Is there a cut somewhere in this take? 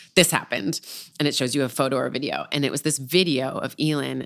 no; 0 cuts

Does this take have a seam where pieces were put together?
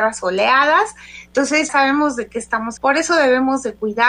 yes; 2 cuts; at 1.7 s, 2.8 s

